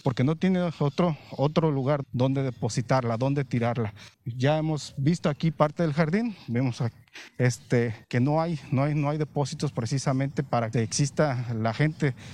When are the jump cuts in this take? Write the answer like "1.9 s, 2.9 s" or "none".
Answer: 2.0 s, 4.1 s, 8.0 s, 10.7 s